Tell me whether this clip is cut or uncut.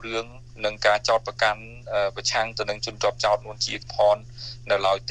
cut